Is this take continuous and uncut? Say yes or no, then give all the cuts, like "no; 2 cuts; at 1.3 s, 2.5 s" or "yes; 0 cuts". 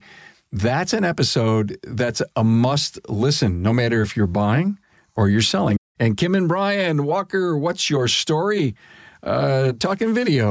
yes; 0 cuts